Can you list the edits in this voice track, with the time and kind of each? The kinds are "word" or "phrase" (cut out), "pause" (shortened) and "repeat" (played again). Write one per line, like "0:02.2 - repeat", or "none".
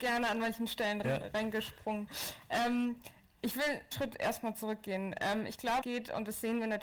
0:01.0 - word
0:03.9 - word
0:05.8 - word